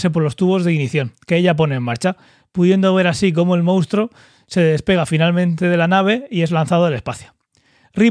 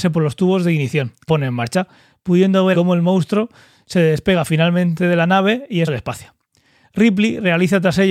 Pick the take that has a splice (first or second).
second